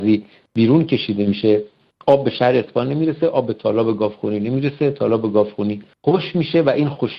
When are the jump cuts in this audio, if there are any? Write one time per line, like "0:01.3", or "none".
none